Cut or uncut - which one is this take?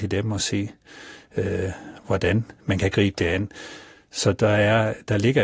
uncut